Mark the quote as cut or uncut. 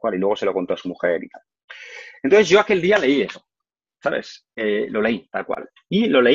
uncut